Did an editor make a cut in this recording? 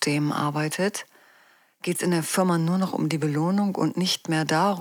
no; 0 cuts

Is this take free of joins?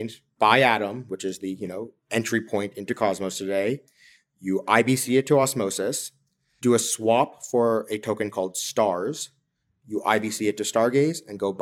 yes; 0 cuts

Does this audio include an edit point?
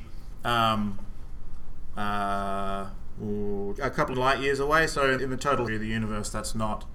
yes; 4 cuts; at 3.8 s, 4.1 s, 5.2 s, 5.7 s

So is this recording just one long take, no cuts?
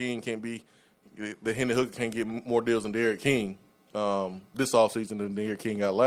yes; 0 cuts

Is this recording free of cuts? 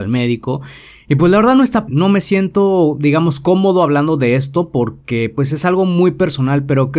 no; 1 cut; at 1.9 s

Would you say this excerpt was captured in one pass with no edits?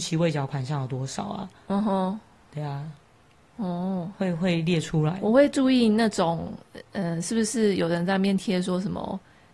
yes; 0 cuts

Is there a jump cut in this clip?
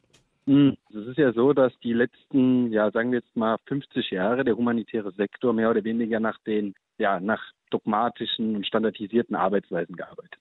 no; 0 cuts

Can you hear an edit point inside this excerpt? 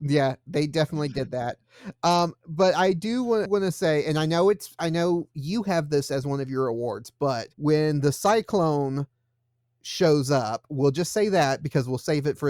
yes; 2 cuts; at 3.5 s, 7.5 s

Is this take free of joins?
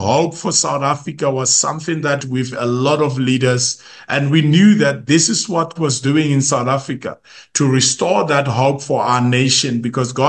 no; 2 cuts; at 2.2 s, 5.8 s

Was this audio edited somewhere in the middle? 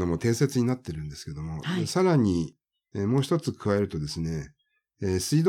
no; 0 cuts

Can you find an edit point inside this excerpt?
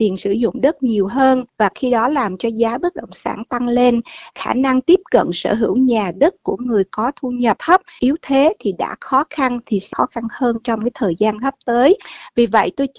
yes; 1 cut; at 1.5 s

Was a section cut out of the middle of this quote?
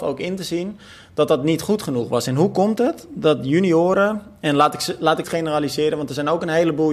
yes; 1 cut; at 5.2 s

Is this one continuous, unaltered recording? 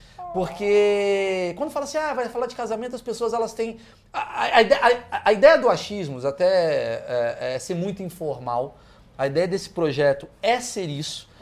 yes; 0 cuts

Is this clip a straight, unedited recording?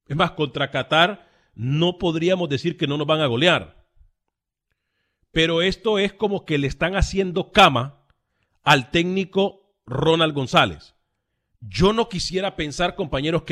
yes; 0 cuts

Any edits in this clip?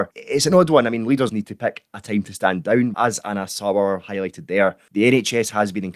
yes; 2 cuts; at 1.3 s, 2.9 s

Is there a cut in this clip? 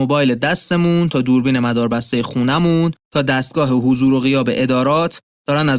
yes; 1 cut; at 3.0 s

